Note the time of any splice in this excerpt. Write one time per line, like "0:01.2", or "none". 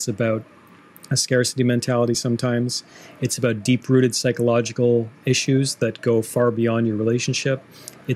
none